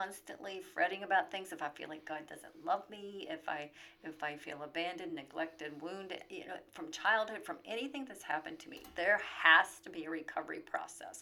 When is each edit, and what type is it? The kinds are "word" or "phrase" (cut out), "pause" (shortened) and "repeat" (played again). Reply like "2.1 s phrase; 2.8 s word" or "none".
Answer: none